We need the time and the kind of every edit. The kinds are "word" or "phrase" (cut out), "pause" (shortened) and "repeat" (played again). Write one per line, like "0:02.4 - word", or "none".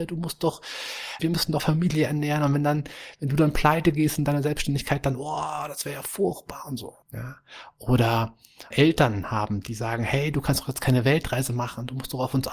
0:01.2 - word
0:01.6 - word
0:07.0 - pause
0:08.7 - word